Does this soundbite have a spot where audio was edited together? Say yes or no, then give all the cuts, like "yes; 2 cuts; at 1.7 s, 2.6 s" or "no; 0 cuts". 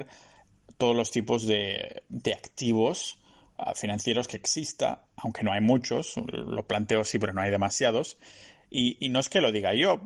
no; 0 cuts